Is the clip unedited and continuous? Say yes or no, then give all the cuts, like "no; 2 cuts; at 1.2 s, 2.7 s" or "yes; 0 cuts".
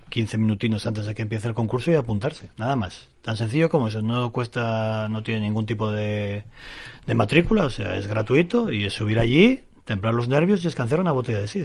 no; 1 cut; at 2.5 s